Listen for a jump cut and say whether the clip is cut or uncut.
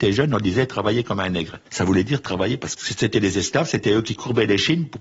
cut